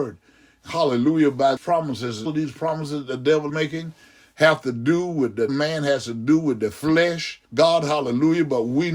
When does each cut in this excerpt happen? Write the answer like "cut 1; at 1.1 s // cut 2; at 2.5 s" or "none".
cut 1; at 1.6 s // cut 2; at 2.3 s // cut 3; at 3.5 s // cut 4; at 5.5 s // cut 5; at 7.4 s